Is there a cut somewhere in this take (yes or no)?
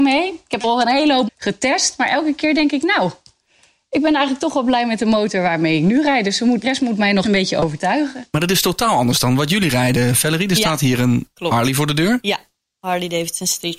yes